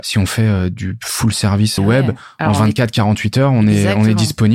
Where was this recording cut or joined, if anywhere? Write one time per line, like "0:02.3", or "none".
0:01.8